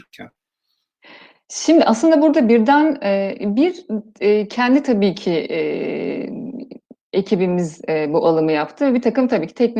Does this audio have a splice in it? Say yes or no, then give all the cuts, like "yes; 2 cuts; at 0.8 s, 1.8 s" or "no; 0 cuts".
no; 0 cuts